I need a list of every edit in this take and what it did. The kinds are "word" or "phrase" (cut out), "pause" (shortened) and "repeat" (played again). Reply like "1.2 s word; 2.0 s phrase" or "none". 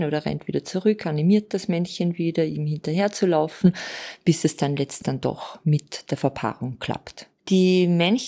5.0 s word; 7.4 s pause